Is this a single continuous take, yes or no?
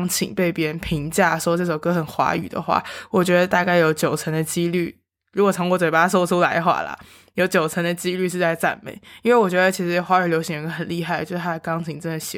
yes